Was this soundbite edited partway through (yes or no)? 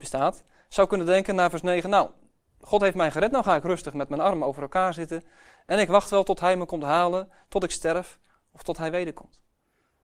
no